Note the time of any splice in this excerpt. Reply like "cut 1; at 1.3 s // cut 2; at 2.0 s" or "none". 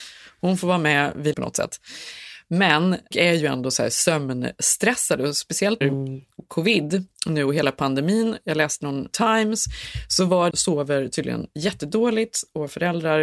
cut 1; at 1.3 s // cut 2; at 3.1 s // cut 3; at 5.8 s // cut 4; at 7.1 s // cut 5; at 9.1 s // cut 6; at 10.5 s